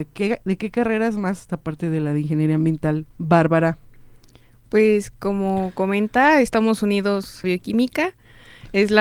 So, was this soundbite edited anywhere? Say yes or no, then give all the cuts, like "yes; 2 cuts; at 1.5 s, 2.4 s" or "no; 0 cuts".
yes; 3 cuts; at 1.5 s, 3.1 s, 7.4 s